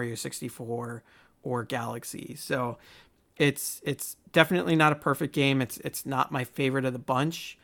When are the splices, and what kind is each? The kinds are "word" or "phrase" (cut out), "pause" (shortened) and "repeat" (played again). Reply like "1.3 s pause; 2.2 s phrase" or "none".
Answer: none